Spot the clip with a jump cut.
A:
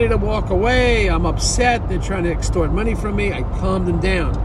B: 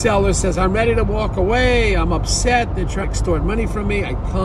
B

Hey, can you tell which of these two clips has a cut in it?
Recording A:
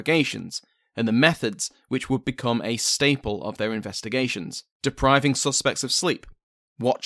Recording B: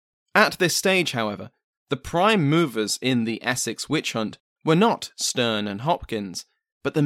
A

